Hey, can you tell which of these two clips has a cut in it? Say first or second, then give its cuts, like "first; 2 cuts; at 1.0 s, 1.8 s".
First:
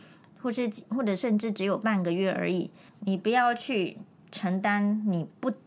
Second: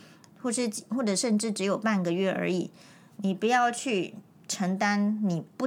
first; 1 cut; at 2.9 s